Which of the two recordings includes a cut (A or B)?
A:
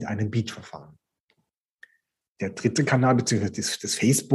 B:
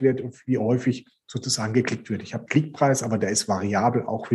B